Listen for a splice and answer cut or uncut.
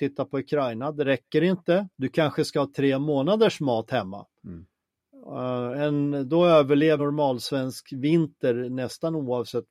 cut